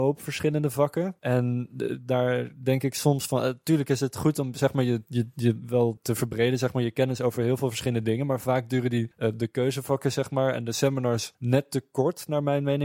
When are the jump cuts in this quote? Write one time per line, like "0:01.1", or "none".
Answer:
none